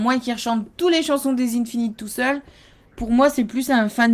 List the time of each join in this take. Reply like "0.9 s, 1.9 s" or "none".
none